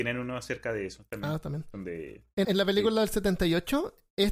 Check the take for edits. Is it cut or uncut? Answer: cut